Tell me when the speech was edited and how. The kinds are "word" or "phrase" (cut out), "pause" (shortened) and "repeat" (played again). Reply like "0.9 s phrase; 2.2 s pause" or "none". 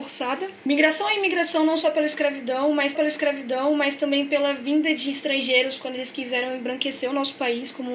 3.0 s repeat